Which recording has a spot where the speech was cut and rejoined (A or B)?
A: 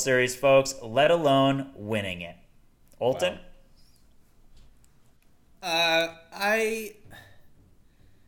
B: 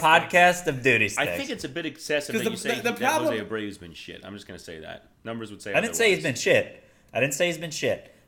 B